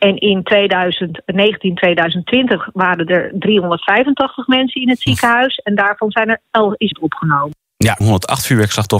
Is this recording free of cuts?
no; 2 cuts; at 6.9 s, 8.0 s

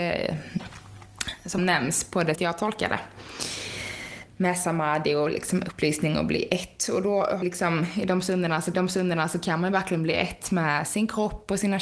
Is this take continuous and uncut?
no; 4 cuts; at 1.6 s, 2.3 s, 7.4 s, 8.7 s

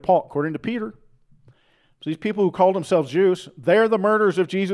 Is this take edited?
no; 0 cuts

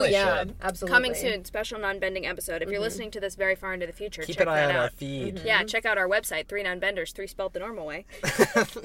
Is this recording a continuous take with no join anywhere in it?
yes; 0 cuts

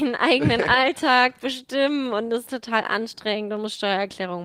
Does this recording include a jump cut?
no; 0 cuts

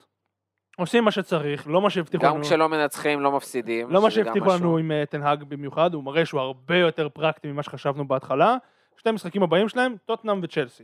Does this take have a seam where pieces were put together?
no; 0 cuts

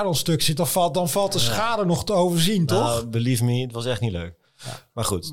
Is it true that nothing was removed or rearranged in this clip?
yes; 0 cuts

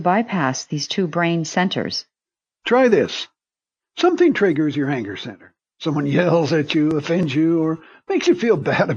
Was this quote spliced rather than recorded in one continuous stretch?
no; 0 cuts

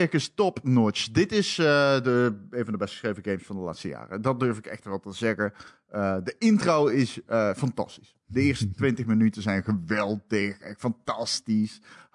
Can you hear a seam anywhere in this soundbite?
no; 0 cuts

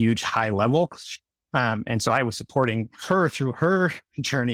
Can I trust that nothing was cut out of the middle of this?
yes; 0 cuts

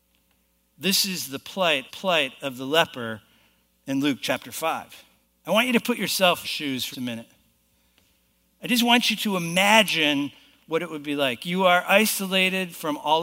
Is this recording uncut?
no; 4 cuts; at 1.9 s, 5.2 s, 6.4 s, 6.9 s

